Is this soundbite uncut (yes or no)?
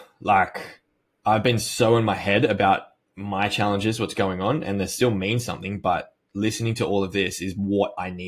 yes